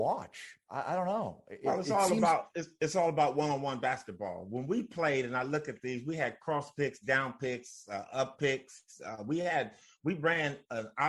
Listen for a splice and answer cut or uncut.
uncut